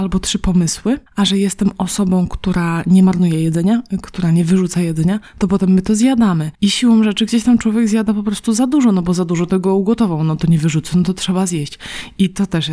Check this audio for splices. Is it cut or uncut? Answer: cut